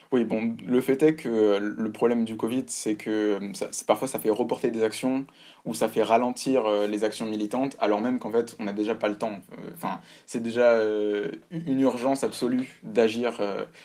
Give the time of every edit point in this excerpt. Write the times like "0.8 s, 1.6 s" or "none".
none